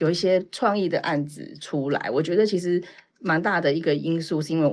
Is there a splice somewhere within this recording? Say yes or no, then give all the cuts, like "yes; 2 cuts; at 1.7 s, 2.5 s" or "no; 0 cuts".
no; 0 cuts